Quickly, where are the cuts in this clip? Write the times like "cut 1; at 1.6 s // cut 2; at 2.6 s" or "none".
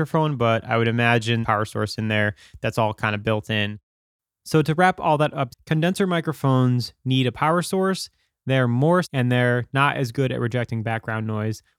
cut 1; at 1.4 s // cut 2; at 5.5 s // cut 3; at 9.0 s

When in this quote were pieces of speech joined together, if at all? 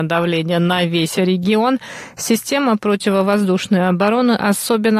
none

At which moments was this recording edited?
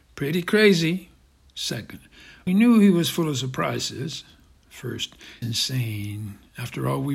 cut 1; at 2.5 s // cut 2; at 5.4 s

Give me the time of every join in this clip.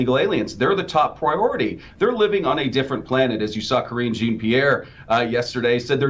none

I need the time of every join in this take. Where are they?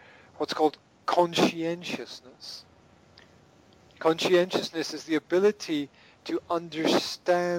none

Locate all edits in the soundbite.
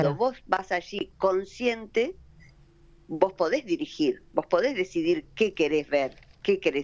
none

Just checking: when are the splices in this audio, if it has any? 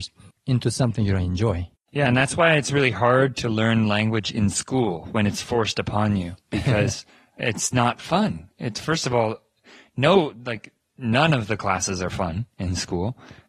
cut 1; at 7.1 s

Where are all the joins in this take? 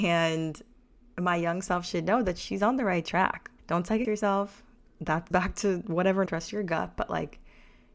cut 1; at 3.6 s // cut 2; at 4.0 s // cut 3; at 5.3 s // cut 4; at 6.3 s

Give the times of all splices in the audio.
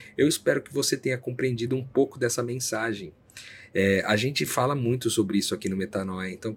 none

